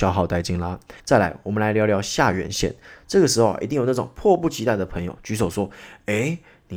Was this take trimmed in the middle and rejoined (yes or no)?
yes